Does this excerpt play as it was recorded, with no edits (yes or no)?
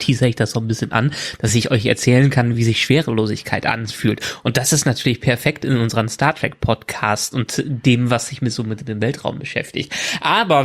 yes